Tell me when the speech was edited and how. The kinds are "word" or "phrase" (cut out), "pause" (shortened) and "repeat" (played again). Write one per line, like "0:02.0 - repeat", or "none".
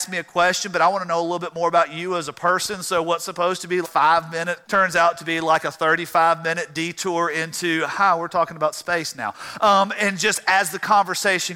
0:03.8 - word
0:04.6 - phrase